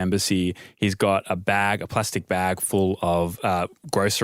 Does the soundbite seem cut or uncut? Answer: uncut